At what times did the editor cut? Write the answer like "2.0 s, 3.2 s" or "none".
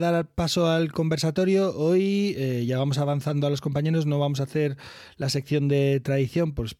none